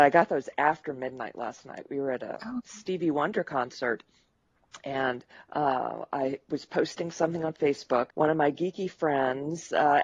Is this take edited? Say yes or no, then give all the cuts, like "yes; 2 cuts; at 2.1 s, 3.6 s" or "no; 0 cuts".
yes; 2 cuts; at 5.3 s, 8.1 s